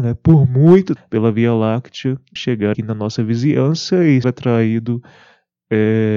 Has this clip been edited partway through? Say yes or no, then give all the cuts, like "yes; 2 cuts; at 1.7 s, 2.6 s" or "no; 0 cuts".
yes; 4 cuts; at 1.0 s, 2.4 s, 2.7 s, 4.2 s